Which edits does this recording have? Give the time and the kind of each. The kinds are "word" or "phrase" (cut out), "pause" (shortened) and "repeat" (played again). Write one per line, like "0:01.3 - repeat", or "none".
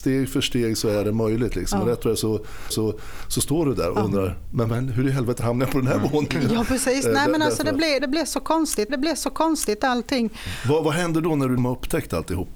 0:02.7 - repeat
0:08.0 - word
0:08.9 - repeat
0:11.6 - word